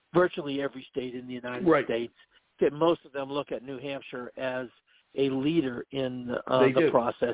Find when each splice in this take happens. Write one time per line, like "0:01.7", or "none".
none